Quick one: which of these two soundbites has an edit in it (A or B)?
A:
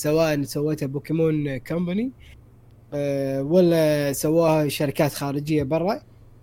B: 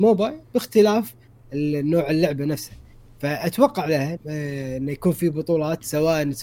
B